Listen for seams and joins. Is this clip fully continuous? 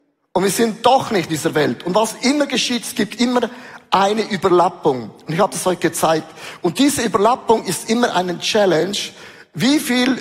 no; 1 cut; at 1.3 s

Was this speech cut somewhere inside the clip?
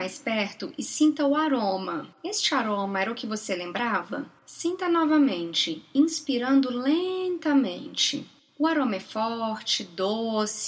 no; 0 cuts

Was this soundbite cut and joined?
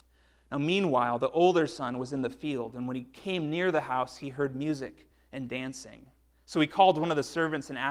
no; 0 cuts

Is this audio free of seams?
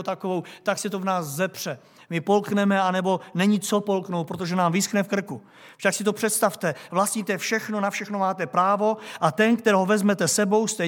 yes; 0 cuts

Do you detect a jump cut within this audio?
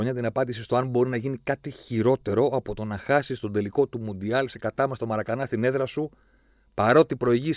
no; 0 cuts

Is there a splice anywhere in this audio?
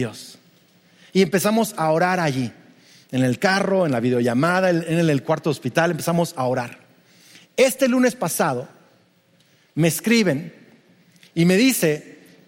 no; 0 cuts

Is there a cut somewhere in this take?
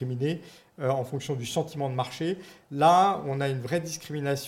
no; 0 cuts

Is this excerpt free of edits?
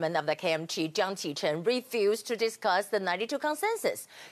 yes; 0 cuts

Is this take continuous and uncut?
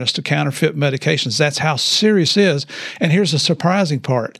no; 1 cut; at 2.3 s

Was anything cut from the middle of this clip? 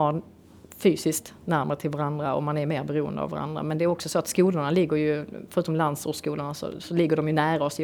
no; 0 cuts

